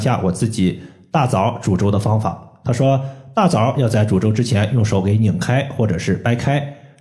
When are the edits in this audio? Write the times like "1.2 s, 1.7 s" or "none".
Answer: none